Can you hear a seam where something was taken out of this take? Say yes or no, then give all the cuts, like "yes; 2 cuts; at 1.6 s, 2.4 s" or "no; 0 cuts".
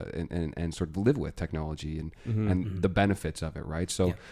no; 0 cuts